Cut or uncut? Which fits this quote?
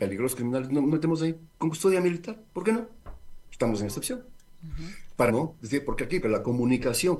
cut